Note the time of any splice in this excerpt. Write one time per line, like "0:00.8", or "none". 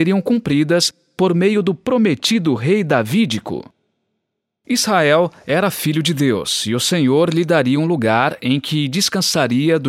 none